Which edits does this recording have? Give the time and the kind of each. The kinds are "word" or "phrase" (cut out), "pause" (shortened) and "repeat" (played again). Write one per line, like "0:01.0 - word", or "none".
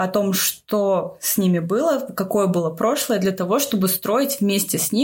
none